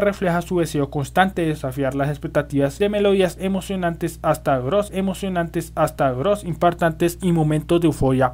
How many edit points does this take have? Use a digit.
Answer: 2